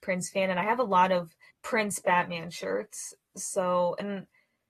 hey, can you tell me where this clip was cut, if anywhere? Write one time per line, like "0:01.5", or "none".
0:01.5